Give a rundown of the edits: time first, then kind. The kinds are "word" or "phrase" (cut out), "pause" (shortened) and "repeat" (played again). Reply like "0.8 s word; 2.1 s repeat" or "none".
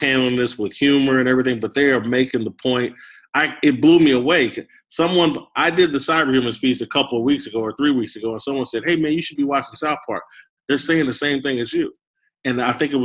none